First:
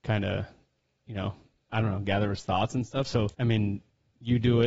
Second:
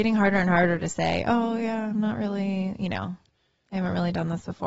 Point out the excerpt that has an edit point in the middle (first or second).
first